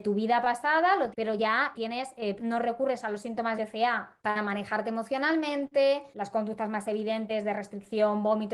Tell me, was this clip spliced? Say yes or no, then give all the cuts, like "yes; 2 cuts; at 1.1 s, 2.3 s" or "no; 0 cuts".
yes; 6 cuts; at 1.1 s, 1.7 s, 2.4 s, 3.6 s, 4.2 s, 6.1 s